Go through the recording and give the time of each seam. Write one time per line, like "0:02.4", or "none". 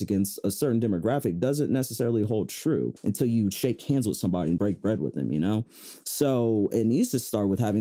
0:03.0
0:04.6